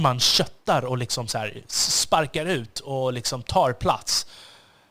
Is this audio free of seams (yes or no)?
yes